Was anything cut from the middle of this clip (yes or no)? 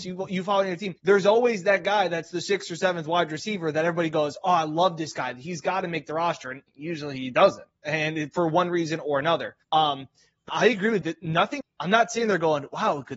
yes